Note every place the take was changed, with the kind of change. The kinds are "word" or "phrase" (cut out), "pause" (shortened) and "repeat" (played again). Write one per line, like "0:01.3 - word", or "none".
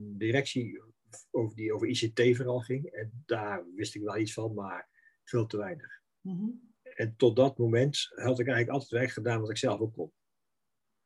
0:06.8 - pause